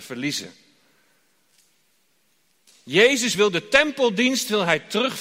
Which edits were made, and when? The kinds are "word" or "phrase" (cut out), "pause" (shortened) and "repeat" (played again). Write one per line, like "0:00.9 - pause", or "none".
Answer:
none